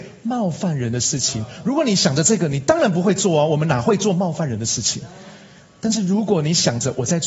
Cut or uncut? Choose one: uncut